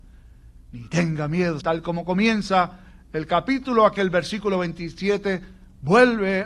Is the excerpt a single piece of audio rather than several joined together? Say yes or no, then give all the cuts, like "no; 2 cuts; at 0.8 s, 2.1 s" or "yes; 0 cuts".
no; 2 cuts; at 1.6 s, 4.0 s